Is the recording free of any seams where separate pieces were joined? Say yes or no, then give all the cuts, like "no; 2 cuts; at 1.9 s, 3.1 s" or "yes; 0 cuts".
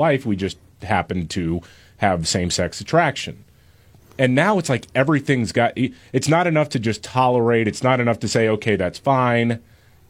yes; 0 cuts